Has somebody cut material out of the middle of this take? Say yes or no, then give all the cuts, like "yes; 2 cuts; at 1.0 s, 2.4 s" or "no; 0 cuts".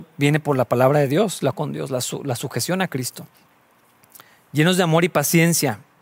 yes; 1 cut; at 1.5 s